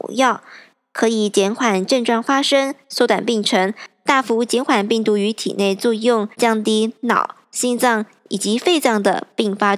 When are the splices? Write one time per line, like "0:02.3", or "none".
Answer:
0:06.3